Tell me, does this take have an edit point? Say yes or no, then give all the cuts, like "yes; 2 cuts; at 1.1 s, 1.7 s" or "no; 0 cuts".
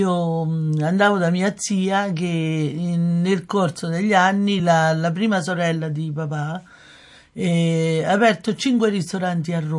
no; 0 cuts